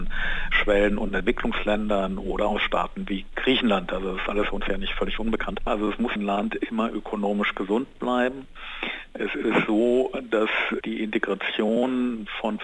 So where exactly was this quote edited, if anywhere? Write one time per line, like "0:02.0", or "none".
0:06.2